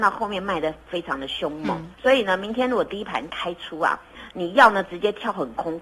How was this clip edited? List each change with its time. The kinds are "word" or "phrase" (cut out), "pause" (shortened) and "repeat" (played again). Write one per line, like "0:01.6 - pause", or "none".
0:01.9 - pause